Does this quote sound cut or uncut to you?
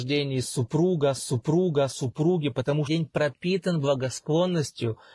cut